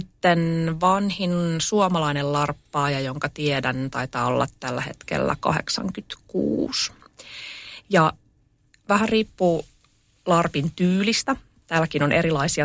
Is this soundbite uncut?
yes; 0 cuts

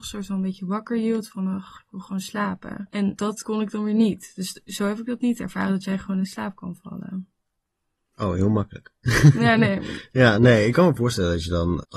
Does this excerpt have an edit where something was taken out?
no; 0 cuts

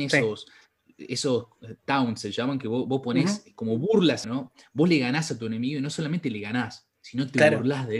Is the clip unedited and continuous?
no; 1 cut; at 4.2 s

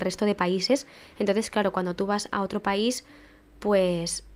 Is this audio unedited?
yes; 0 cuts

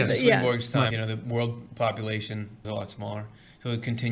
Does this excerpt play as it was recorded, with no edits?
no; 2 cuts; at 0.9 s, 2.6 s

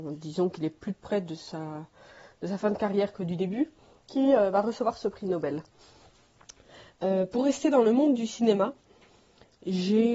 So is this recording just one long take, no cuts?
yes; 0 cuts

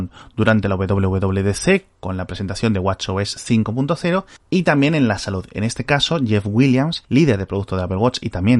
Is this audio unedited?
yes; 0 cuts

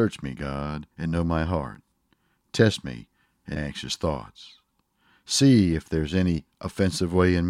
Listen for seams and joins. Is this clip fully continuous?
no; 2 cuts; at 0.9 s, 3.6 s

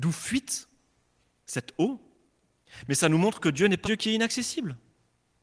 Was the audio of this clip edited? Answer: yes; 1 cut; at 3.8 s

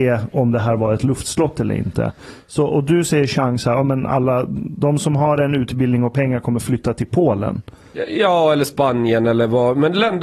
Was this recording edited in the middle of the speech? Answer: no; 0 cuts

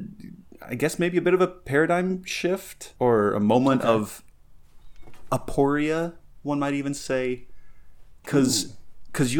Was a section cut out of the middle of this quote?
yes; 1 cut; at 3.0 s

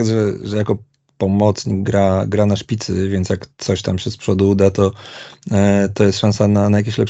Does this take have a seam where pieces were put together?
no; 0 cuts

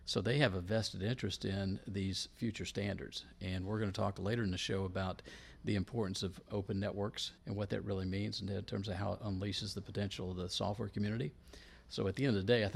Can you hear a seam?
yes; 1 cut; at 7.4 s

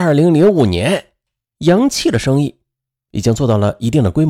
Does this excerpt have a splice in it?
no; 0 cuts

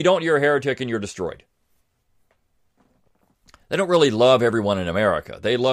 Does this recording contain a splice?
no; 0 cuts

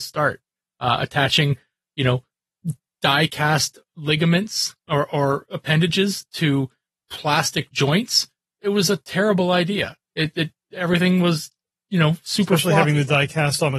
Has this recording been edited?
yes; 1 cut; at 10.3 s

